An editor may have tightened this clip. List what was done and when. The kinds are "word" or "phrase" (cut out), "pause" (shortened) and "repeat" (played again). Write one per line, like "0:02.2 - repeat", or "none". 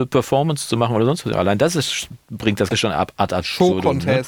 0:02.7 - word